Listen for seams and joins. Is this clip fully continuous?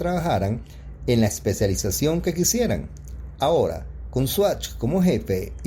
yes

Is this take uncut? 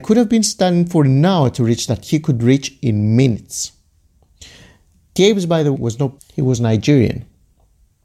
no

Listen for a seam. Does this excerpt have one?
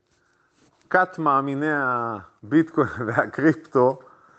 no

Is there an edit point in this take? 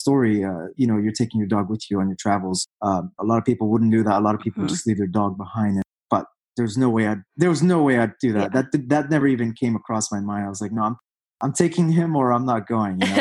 no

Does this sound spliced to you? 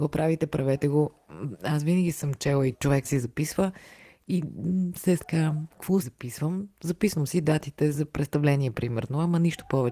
yes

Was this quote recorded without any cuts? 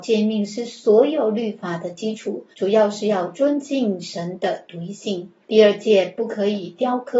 no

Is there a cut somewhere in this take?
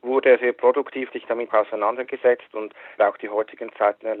yes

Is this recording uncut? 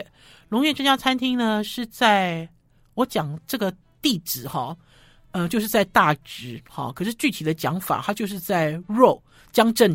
yes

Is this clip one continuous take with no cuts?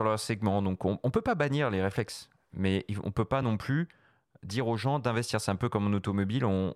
yes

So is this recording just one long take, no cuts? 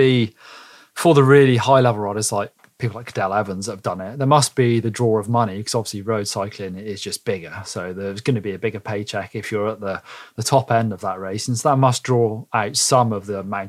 yes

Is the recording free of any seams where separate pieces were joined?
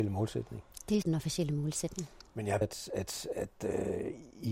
no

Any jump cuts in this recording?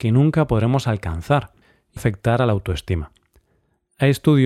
yes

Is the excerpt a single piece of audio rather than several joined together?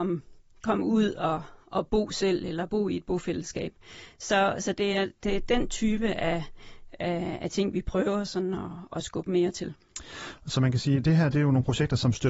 yes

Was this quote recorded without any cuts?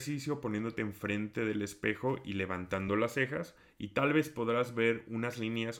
yes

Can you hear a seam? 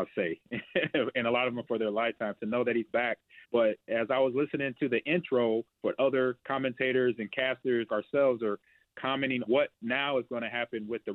yes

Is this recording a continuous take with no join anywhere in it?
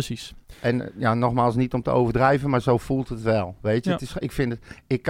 yes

